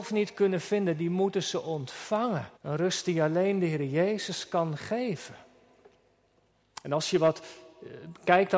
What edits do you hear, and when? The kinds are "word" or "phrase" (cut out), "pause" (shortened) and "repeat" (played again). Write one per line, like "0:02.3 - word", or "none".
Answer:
0:02.6 - pause